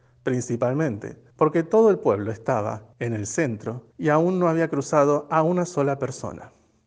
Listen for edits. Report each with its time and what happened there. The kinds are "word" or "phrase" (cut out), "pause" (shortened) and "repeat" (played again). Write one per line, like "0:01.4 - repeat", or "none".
0:01.3 - pause
0:02.9 - pause
0:03.9 - pause